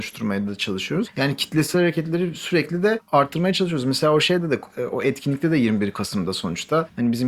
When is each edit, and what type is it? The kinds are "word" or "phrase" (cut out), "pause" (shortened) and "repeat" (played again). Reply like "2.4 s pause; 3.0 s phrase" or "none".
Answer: none